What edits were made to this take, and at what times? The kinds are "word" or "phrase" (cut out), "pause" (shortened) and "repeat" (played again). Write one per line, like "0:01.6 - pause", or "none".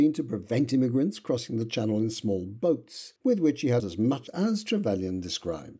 0:03.8 - word
0:04.3 - word